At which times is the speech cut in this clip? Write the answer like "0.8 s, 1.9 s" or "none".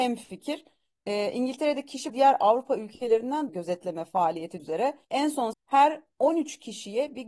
2.1 s, 3.5 s, 4.6 s, 5.0 s, 5.5 s